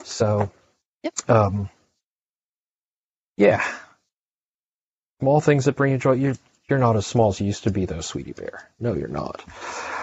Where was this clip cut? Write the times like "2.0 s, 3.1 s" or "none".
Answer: none